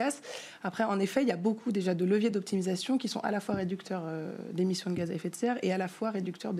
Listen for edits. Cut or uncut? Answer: uncut